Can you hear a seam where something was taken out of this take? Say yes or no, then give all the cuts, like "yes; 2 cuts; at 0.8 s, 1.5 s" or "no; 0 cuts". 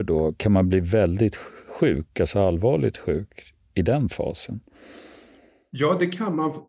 no; 0 cuts